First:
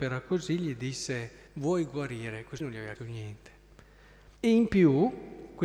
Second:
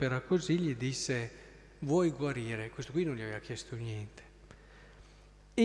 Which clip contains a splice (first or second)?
first